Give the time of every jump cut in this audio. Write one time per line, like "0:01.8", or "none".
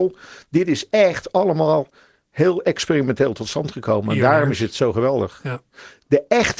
none

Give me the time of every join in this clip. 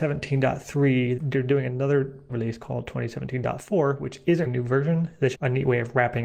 0:01.2
0:02.3
0:04.5
0:05.3

